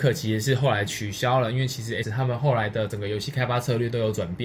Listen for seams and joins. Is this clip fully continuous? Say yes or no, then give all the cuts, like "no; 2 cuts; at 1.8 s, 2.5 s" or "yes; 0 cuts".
no; 1 cut; at 2.0 s